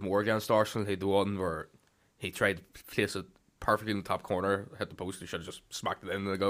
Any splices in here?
no; 0 cuts

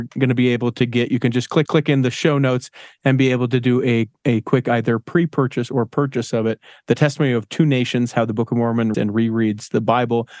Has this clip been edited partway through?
yes; 2 cuts; at 1.7 s, 8.9 s

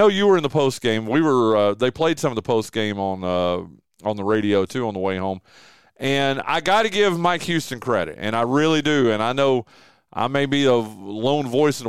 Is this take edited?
no; 0 cuts

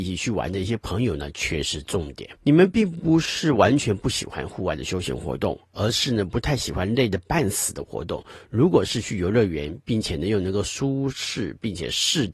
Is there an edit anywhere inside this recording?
yes; 1 cut; at 2.4 s

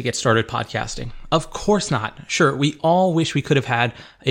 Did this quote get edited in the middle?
no; 0 cuts

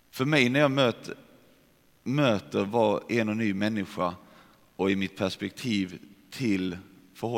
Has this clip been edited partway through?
no; 0 cuts

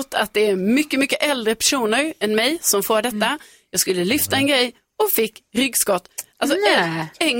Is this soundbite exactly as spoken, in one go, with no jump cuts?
yes; 0 cuts

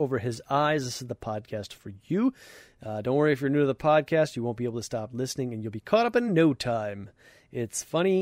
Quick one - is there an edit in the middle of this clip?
no; 0 cuts

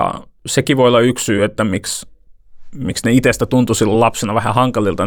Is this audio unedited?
yes; 0 cuts

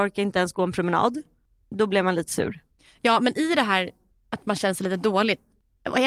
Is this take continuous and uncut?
yes; 0 cuts

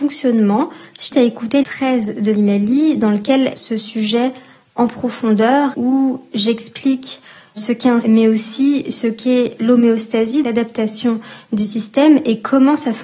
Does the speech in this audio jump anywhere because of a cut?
yes; 8 cuts; at 1.1 s, 1.6 s, 2.3 s, 3.5 s, 5.7 s, 7.6 s, 8.0 s, 10.4 s

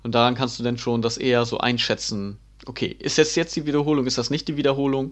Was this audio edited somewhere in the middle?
no; 0 cuts

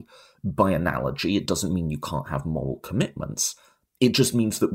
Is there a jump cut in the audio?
no; 0 cuts

